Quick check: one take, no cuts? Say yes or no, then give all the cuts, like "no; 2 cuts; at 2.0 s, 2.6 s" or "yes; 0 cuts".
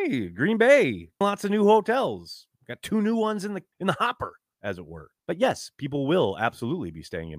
no; 3 cuts; at 1.2 s, 3.7 s, 5.2 s